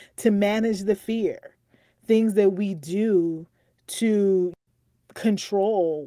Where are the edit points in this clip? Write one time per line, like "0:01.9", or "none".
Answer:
none